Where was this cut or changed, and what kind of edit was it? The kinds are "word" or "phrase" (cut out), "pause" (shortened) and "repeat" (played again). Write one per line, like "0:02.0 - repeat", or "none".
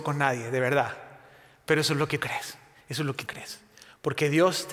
0:02.2 - word
0:03.3 - word

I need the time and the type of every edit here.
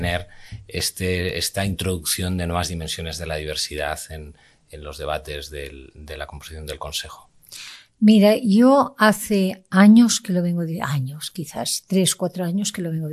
none

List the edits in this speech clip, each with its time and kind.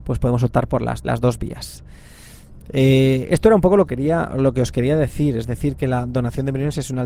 0:01.0 - word
0:03.9 - word

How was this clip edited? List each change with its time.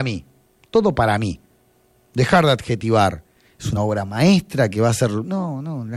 none

